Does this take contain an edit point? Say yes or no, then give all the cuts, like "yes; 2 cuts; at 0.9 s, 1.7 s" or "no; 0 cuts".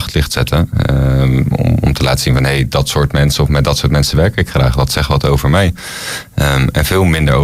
no; 0 cuts